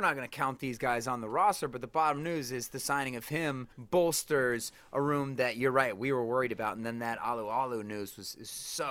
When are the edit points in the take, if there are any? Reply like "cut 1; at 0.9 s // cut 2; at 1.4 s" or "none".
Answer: cut 1; at 3.7 s